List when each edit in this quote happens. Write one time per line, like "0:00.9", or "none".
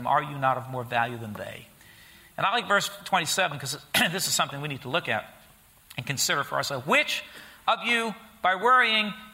none